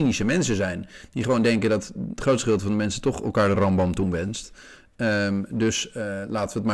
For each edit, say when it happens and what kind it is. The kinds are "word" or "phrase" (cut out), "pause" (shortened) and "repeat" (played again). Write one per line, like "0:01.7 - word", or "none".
none